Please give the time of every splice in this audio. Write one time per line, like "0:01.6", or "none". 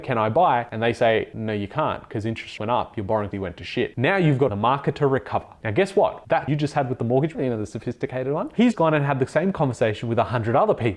0:02.6
0:03.3
0:04.5
0:06.5
0:07.3
0:08.7